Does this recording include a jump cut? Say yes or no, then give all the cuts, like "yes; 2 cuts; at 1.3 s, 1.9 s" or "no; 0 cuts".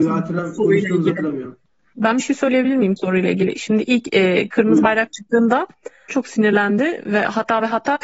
yes; 3 cuts; at 1.7 s, 3.0 s, 6.1 s